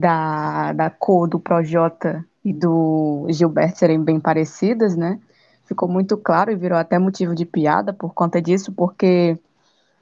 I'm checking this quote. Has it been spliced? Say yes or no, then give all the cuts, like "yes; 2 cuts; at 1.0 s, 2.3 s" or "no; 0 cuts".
no; 0 cuts